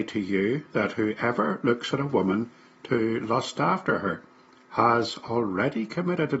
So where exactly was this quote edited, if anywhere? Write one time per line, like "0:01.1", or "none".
none